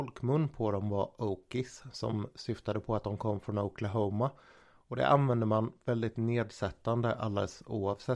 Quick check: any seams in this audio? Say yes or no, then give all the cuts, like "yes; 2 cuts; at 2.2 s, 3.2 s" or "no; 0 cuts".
no; 0 cuts